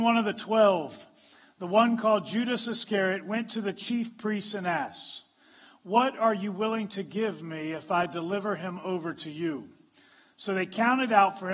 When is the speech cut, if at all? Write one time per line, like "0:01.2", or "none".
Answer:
none

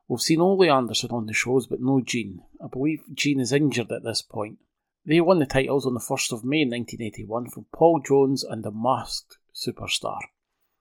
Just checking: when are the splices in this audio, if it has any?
0:04.8

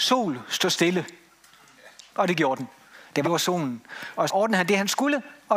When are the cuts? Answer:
0:02.1
0:03.2
0:04.3

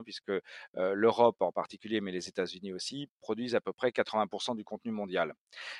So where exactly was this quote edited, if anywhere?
none

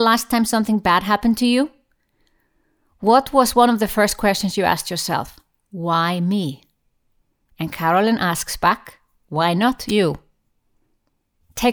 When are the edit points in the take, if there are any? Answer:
none

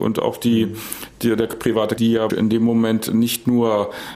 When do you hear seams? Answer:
0:02.0
0:02.3

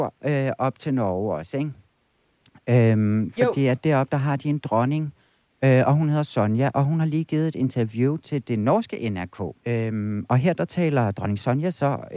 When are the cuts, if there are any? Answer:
0:09.6

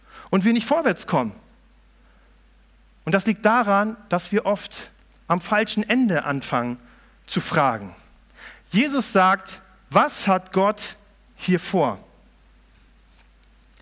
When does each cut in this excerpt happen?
none

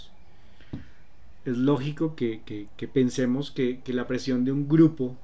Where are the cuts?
none

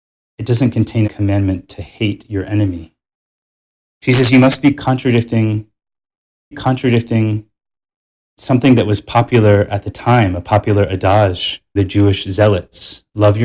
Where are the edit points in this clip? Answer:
0:01.0
0:06.5
0:11.8

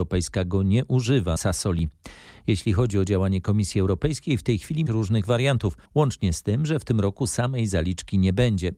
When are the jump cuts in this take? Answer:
0:01.4
0:04.9
0:05.9

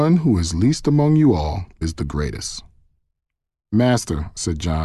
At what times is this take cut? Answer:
0:01.8

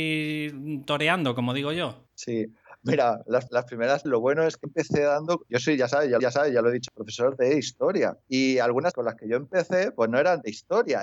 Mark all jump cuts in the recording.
0:02.1
0:03.5
0:04.1
0:04.6
0:05.5
0:06.2
0:06.9
0:08.2
0:08.9

